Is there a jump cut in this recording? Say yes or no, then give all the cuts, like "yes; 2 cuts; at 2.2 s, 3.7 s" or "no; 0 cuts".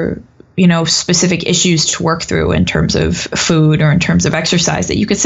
no; 0 cuts